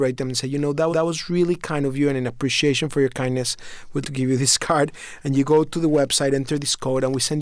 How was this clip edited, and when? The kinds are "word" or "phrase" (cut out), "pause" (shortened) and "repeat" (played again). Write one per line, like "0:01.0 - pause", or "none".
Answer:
0:00.9 - repeat
0:04.0 - word